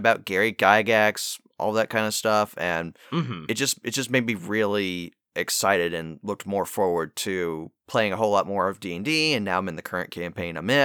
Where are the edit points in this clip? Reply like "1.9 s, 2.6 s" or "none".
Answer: 3.0 s